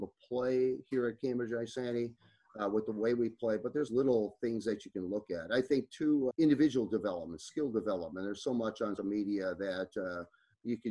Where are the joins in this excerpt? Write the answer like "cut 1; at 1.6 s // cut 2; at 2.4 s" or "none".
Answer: cut 1; at 3.9 s // cut 2; at 6.3 s // cut 3; at 9.0 s